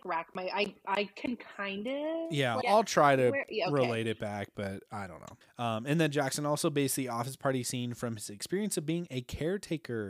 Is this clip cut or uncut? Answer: cut